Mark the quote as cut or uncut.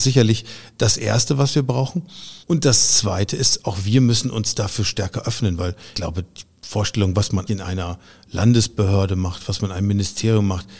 cut